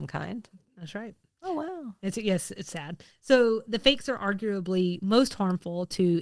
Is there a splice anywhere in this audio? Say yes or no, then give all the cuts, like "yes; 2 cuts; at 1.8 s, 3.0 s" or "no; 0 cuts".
no; 0 cuts